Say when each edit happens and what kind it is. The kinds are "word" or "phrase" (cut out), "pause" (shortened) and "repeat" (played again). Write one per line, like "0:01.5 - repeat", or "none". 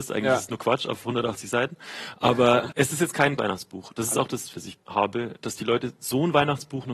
0:02.7 - word
0:03.4 - word
0:04.5 - word
0:04.8 - word
0:05.4 - word